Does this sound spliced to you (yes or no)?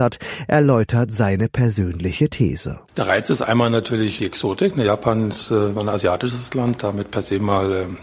yes